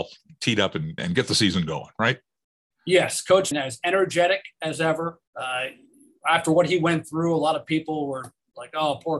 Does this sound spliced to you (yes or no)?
yes